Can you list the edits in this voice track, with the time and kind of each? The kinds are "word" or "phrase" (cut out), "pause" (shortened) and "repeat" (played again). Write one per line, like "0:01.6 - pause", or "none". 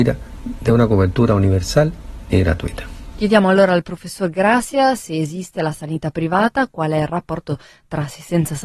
none